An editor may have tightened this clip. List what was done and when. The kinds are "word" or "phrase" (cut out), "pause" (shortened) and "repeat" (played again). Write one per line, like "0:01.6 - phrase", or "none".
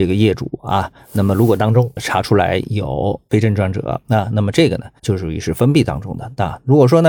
0:04.0 - pause
0:05.0 - pause